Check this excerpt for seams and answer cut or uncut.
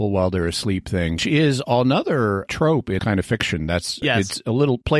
cut